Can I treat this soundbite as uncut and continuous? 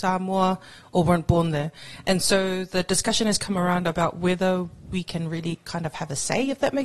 yes; 0 cuts

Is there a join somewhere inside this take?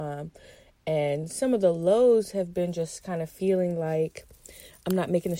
no; 0 cuts

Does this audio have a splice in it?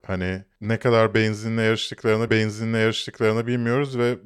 yes; 1 cut; at 2.3 s

